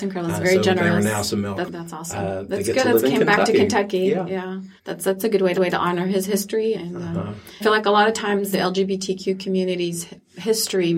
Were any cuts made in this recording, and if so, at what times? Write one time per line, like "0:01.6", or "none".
0:01.7
0:04.8
0:05.5
0:06.7
0:07.6
0:08.5